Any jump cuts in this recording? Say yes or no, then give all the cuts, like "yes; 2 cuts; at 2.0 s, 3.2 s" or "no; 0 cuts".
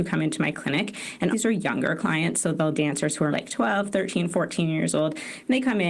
yes; 3 cuts; at 1.3 s, 2.7 s, 3.3 s